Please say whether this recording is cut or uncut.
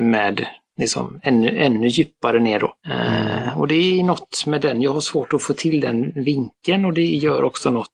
cut